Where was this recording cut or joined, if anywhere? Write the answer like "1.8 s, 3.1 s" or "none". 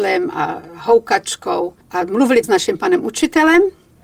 1.8 s, 2.4 s